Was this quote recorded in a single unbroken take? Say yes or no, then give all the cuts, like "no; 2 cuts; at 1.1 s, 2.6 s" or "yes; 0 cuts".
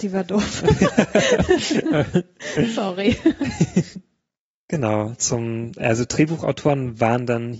no; 1 cut; at 5.2 s